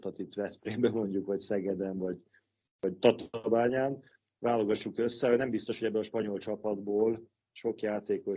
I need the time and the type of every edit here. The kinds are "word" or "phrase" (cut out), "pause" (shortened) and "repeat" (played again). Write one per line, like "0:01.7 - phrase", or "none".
none